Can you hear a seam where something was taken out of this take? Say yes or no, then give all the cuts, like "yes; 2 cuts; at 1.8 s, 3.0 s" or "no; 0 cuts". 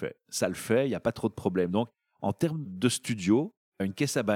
no; 0 cuts